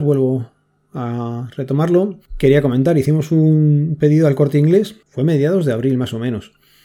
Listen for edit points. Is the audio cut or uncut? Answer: cut